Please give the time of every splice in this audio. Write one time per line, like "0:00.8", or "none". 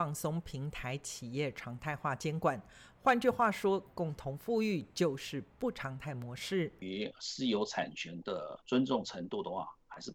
0:08.6